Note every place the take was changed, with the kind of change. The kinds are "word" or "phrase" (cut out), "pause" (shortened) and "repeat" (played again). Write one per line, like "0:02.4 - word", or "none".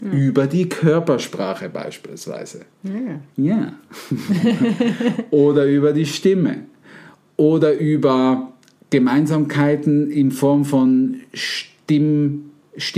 none